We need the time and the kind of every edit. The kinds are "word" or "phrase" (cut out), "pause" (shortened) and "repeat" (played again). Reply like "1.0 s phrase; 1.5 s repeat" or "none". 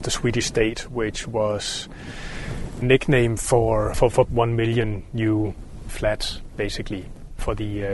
2.8 s phrase; 3.9 s word; 4.2 s word; 5.9 s word